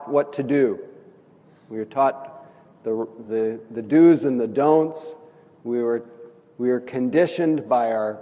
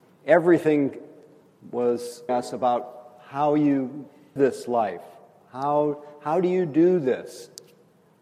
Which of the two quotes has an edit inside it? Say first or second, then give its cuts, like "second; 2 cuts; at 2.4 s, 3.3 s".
second; 2 cuts; at 2.3 s, 4.4 s